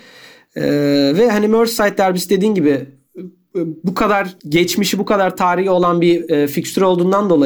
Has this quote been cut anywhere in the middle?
yes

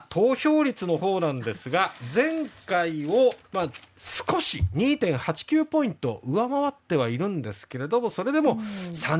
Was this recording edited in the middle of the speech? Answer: yes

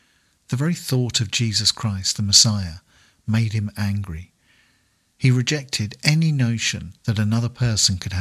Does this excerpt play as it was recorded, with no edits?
yes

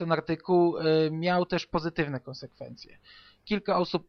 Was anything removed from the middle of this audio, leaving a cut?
no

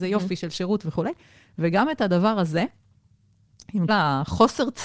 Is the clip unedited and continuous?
no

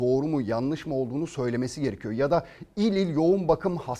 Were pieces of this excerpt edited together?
no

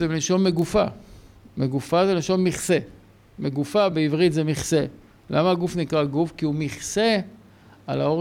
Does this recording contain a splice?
no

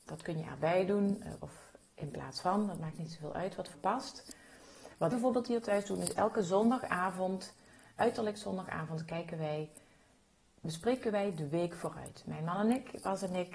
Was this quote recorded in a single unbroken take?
no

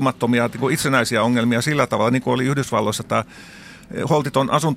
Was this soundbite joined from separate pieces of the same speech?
no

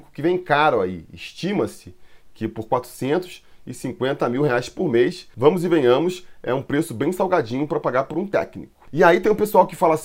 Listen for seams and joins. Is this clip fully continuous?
yes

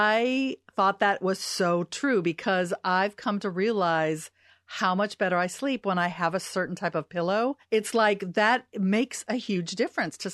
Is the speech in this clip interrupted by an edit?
no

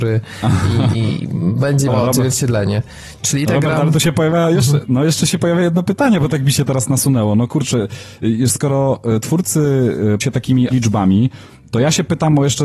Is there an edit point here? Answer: yes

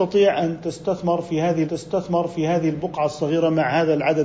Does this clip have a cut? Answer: yes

